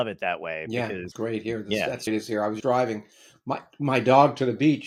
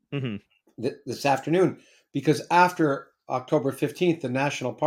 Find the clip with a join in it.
first; 3 cuts; at 1.1 s, 2.1 s, 2.6 s

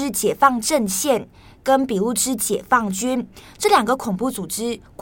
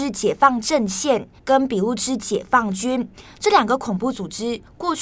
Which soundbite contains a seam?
second; 1 cut; at 1.4 s

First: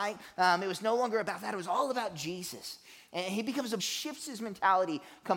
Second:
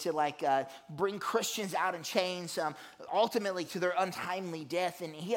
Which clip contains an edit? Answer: first; 1 cut; at 3.8 s

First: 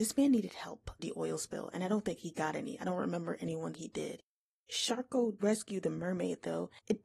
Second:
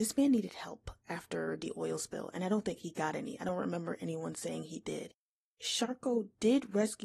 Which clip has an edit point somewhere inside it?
first; 3 cuts; at 1.0 s, 3.7 s, 5.4 s

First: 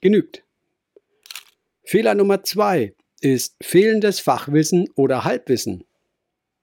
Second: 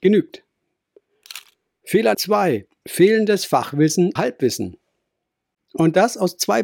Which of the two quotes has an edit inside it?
second; 3 cuts; at 2.1 s, 2.8 s, 4.2 s

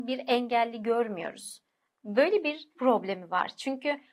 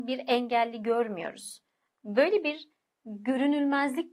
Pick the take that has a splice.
first; 1 cut; at 2.7 s

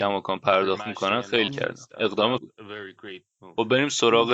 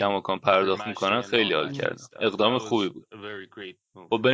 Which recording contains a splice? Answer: first; 2 cuts; at 1.5 s, 2.4 s

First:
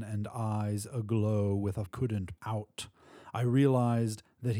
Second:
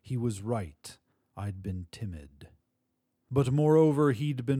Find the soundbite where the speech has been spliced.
first; 2 cuts; at 1.9 s, 2.4 s

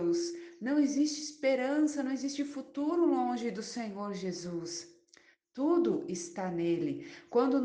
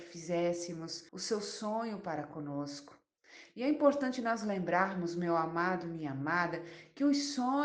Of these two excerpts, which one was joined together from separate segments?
second; 1 cut; at 1.1 s

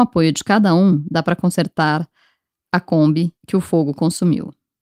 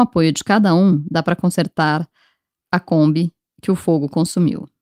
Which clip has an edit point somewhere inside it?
first; 1 cut; at 3.4 s

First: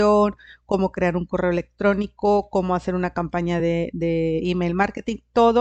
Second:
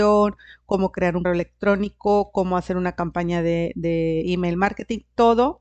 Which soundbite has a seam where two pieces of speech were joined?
second; 1 cut; at 1.2 s

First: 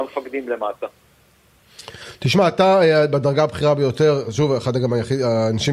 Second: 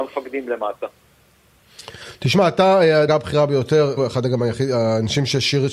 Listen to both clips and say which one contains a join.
second; 2 cuts; at 3.1 s, 4.0 s

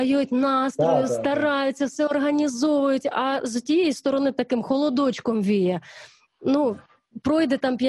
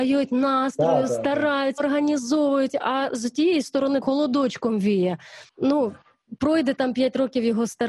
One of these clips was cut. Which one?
second; 3 cuts; at 1.8 s, 4.0 s, 5.5 s

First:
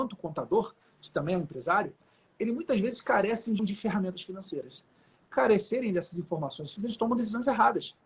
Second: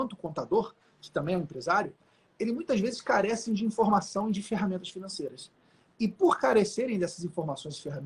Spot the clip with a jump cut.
first; 3 cuts; at 3.6 s, 5.3 s, 6.8 s

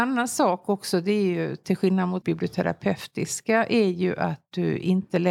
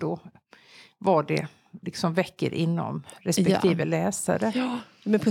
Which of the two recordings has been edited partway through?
first; 1 cut; at 2.2 s

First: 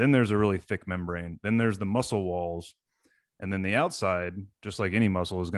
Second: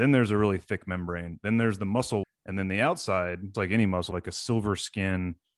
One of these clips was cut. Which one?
second; 3 cuts; at 2.2 s, 3.5 s, 4.1 s

